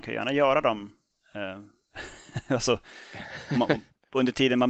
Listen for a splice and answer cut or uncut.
uncut